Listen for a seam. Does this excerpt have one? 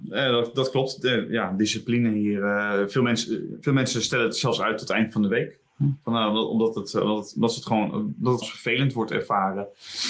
yes; 1 cut; at 8.4 s

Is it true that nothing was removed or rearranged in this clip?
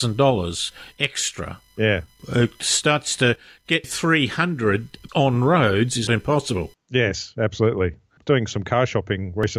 no; 3 cuts; at 3.8 s, 5.1 s, 6.1 s

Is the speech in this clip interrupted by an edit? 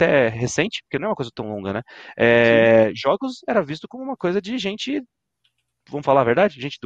no; 0 cuts

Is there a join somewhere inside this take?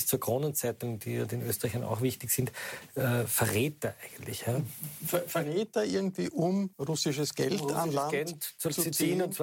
yes; 1 cut; at 6.7 s

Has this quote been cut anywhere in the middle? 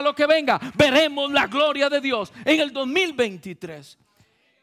no; 0 cuts

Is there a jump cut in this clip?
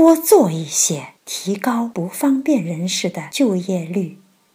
yes; 1 cut; at 1.2 s

